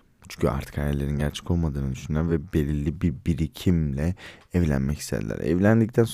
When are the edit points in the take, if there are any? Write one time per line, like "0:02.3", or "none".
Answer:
none

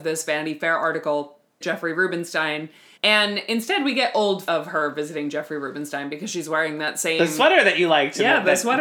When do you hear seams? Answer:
0:01.6
0:02.9
0:04.5

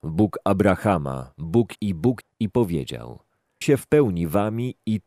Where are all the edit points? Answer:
0:01.8
0:02.2
0:03.6

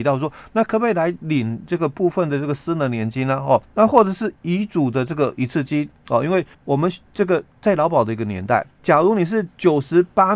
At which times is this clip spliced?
0:03.6
0:06.5
0:08.7

